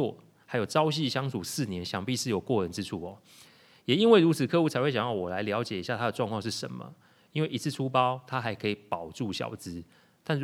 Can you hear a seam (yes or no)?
no